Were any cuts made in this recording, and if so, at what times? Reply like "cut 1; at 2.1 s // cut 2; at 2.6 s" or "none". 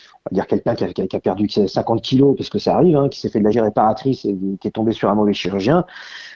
cut 1; at 0.9 s // cut 2; at 3.5 s